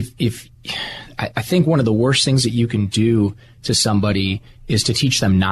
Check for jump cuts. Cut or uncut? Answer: uncut